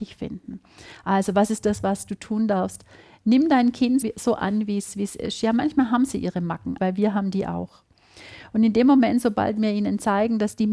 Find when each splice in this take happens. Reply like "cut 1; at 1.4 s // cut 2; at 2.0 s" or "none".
cut 1; at 4.0 s // cut 2; at 6.8 s